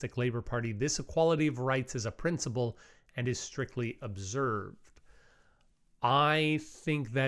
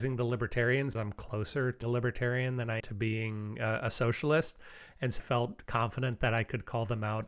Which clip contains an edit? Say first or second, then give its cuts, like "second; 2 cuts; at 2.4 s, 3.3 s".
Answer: second; 4 cuts; at 0.9 s, 1.8 s, 2.8 s, 5.2 s